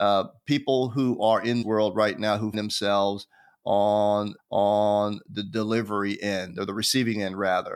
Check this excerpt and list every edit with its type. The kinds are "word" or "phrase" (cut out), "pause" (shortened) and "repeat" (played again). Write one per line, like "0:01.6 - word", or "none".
0:01.6 - word
0:02.5 - word
0:04.4 - repeat